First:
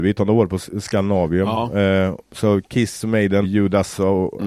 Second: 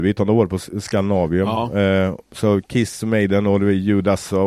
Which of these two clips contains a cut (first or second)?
first